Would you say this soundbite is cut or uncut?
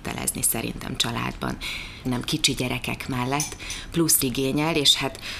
cut